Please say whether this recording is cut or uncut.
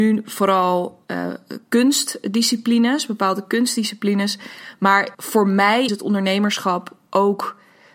cut